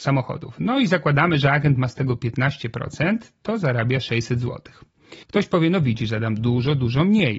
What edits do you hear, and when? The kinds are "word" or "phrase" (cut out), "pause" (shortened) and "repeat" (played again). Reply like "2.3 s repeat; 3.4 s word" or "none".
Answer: 5.2 s pause